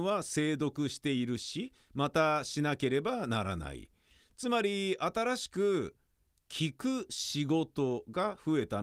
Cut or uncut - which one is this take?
uncut